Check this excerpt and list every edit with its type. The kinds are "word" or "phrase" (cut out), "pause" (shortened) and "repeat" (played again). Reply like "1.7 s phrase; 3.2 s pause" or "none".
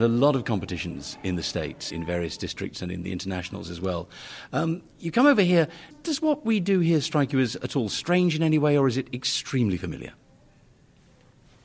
1.9 s word; 5.9 s word

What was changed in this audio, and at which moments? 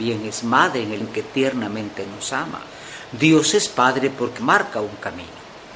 1.0 s word; 4.4 s word

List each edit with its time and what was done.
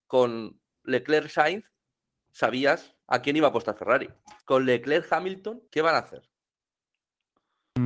3.0 s pause; 4.4 s pause; 5.7 s pause

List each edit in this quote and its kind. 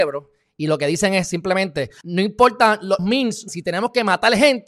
2.0 s word; 3.0 s word; 3.5 s word

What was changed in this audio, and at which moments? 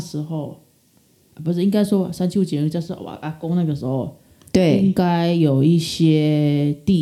none

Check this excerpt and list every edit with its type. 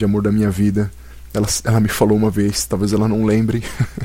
none

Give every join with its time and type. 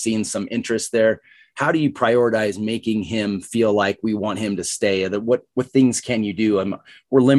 none

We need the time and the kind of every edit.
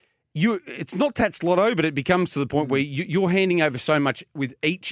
none

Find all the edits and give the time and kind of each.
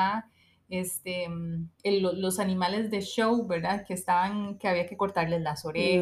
1.7 s pause

